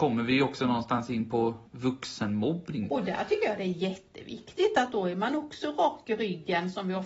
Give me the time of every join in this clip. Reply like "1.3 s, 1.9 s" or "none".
1.7 s